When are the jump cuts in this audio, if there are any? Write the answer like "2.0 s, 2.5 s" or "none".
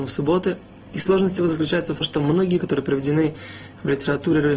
2.0 s, 2.6 s